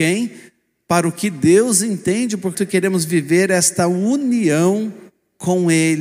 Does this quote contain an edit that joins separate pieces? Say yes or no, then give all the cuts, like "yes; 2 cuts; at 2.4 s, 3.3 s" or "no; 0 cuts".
yes; 1 cut; at 2.5 s